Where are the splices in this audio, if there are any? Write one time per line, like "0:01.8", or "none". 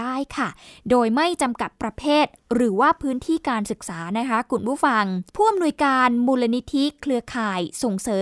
0:05.3